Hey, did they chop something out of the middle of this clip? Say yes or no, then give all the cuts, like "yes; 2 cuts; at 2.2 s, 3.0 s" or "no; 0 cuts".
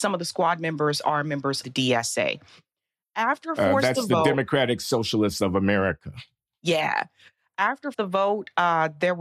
yes; 2 cuts; at 1.6 s, 7.9 s